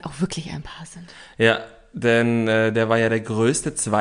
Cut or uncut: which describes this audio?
uncut